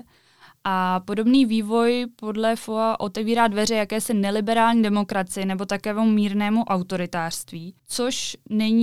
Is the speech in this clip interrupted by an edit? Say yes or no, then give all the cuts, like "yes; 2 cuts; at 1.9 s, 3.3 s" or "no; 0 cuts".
yes; 1 cut; at 7.8 s